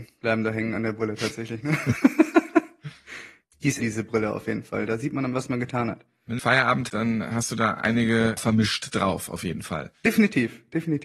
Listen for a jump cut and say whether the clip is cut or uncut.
cut